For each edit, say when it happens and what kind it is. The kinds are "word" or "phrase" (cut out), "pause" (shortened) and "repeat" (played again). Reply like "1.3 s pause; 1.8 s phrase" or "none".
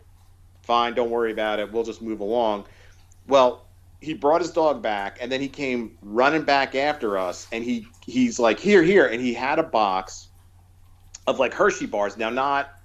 none